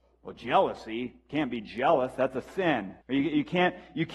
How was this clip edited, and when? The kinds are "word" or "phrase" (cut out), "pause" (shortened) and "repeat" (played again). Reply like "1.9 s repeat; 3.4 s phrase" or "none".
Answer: 3.0 s pause